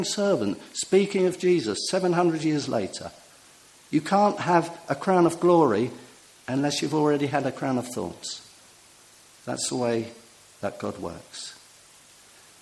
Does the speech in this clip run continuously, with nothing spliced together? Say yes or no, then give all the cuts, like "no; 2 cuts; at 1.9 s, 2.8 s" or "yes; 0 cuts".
yes; 0 cuts